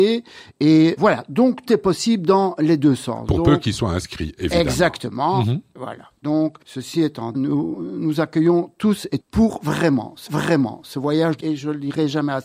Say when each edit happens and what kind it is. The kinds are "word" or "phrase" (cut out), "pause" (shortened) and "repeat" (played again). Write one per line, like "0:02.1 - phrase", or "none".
0:01.0 - word
0:01.7 - word
0:06.6 - pause
0:07.3 - phrase
0:09.2 - word
0:10.3 - repeat
0:11.4 - word